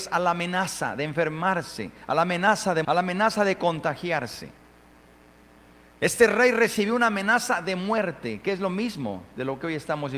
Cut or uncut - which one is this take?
cut